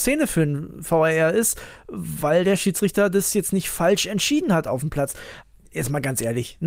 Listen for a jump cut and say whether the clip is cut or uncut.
uncut